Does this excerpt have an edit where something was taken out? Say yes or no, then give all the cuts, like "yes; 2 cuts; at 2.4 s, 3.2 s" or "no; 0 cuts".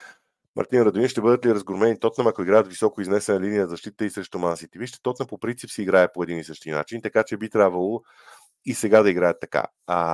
no; 0 cuts